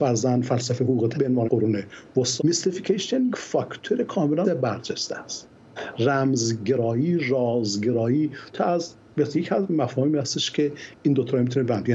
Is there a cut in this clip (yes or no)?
yes